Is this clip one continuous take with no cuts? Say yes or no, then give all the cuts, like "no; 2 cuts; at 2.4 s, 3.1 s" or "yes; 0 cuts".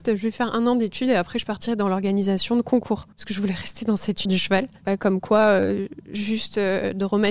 no; 2 cuts; at 3.1 s, 4.3 s